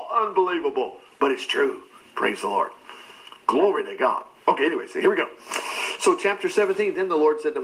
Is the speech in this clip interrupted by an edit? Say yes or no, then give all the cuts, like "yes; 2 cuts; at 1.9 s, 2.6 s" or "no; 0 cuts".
yes; 1 cut; at 3.4 s